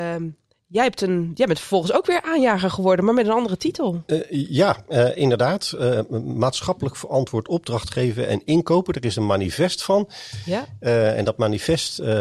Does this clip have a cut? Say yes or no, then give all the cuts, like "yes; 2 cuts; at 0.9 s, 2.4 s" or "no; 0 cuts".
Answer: no; 0 cuts